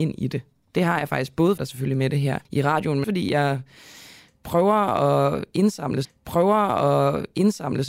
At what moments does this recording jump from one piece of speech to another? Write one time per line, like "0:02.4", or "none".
0:01.6
0:02.4
0:03.0
0:06.0